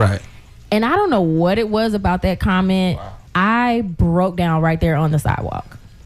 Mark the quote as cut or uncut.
cut